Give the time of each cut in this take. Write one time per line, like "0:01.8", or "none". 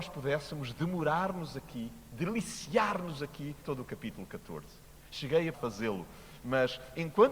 0:03.6
0:05.5